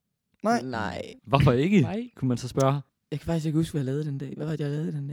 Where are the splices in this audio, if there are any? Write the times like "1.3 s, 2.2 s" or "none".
1.2 s, 2.9 s

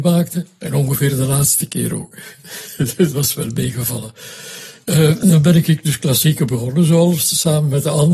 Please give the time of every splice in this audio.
none

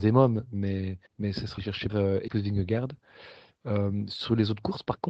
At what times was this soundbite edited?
1.1 s, 1.6 s, 1.9 s, 2.3 s

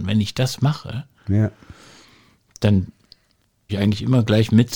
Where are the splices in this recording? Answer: 3.7 s

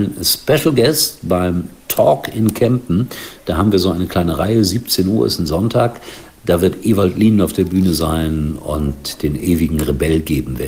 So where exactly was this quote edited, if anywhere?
none

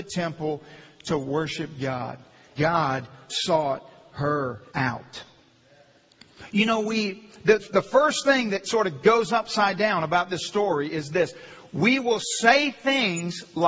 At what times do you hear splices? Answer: 2.6 s, 4.7 s, 7.6 s, 8.6 s

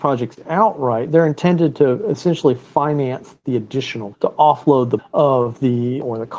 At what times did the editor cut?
4.1 s, 5.0 s

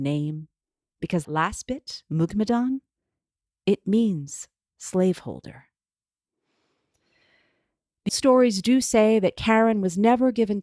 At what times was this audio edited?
1.2 s, 8.1 s

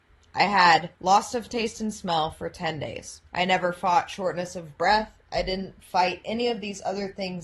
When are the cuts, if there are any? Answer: 0.9 s, 3.3 s

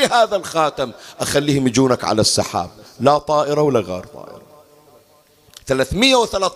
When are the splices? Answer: none

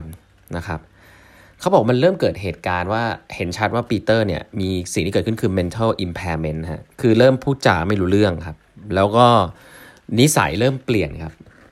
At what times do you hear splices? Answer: 3.2 s, 6.9 s

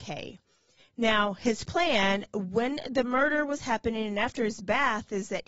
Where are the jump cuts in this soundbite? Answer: none

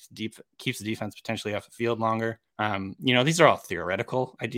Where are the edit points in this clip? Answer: 2.5 s

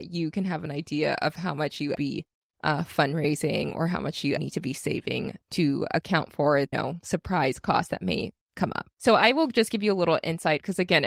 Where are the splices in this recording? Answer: 1.9 s, 4.4 s, 6.7 s, 8.9 s

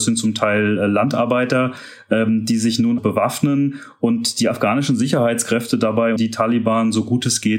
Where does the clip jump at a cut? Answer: 3.0 s, 6.2 s

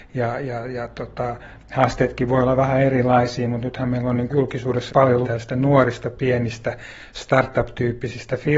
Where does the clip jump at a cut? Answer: 4.3 s, 4.9 s, 5.2 s

